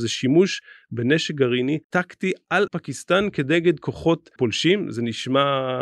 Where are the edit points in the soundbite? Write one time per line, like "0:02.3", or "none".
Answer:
0:01.8
0:02.7
0:04.4

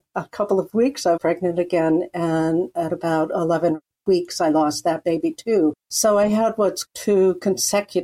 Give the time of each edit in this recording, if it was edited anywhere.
0:01.2
0:05.8
0:06.9

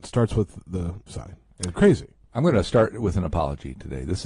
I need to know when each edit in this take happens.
0:01.1
0:01.8

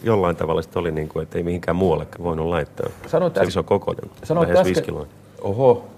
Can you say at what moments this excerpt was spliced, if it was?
0:02.1
0:03.5

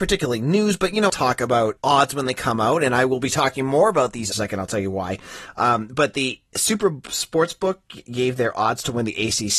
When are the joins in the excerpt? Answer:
0:01.1
0:01.8
0:04.3

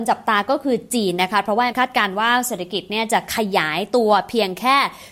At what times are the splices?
0:01.7

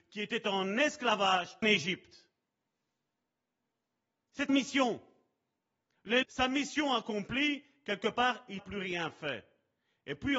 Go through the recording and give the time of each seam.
0:01.6
0:04.5
0:06.2
0:08.6

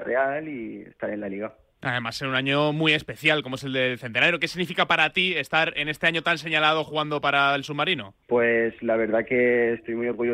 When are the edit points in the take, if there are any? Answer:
0:08.2

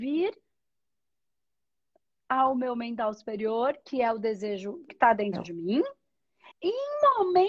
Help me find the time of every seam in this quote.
0:04.9
0:06.5

